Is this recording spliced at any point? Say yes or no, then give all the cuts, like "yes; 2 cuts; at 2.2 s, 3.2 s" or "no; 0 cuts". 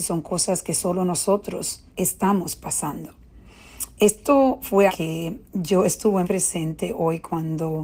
yes; 4 cuts; at 1.9 s, 4.9 s, 5.5 s, 6.2 s